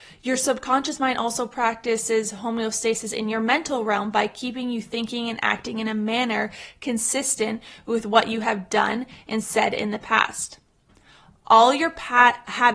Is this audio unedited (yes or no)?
yes